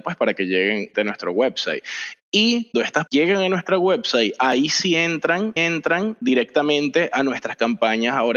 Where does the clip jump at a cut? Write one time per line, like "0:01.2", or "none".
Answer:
0:00.9
0:02.7
0:03.1
0:05.6